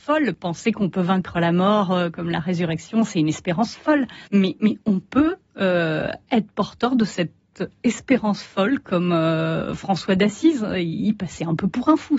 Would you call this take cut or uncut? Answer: cut